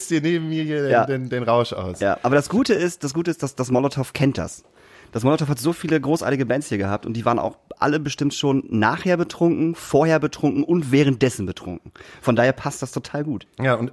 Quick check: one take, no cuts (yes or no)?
yes